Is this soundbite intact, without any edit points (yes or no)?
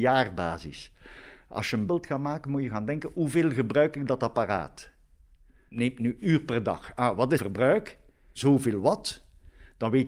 no